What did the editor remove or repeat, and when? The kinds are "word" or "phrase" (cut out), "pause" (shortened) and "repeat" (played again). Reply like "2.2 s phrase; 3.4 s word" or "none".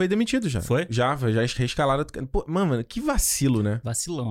none